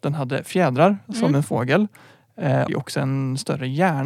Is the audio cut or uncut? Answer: cut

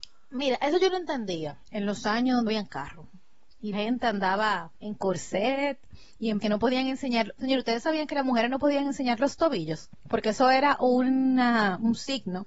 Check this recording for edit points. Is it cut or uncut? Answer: cut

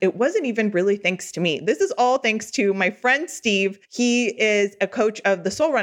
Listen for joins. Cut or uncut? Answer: cut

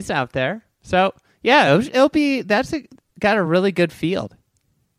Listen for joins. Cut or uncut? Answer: uncut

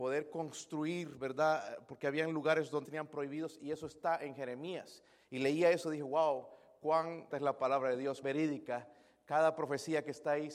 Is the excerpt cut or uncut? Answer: cut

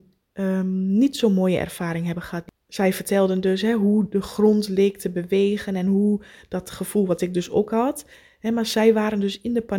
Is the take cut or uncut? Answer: uncut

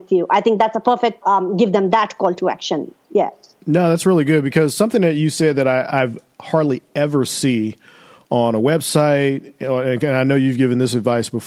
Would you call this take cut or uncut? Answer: cut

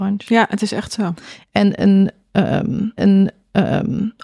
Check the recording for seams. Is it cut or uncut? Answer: cut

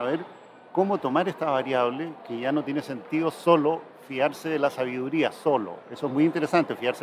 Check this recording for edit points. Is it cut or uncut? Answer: uncut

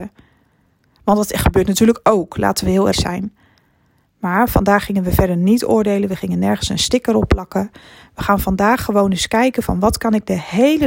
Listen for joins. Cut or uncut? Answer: cut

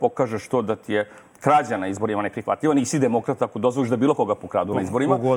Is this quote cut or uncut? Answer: uncut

